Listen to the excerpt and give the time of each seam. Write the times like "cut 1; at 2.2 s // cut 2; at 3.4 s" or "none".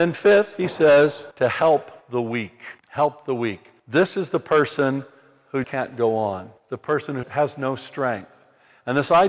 cut 1; at 1.3 s // cut 2; at 2.0 s // cut 3; at 2.8 s // cut 4; at 3.8 s // cut 5; at 5.6 s // cut 6; at 6.6 s // cut 7; at 7.2 s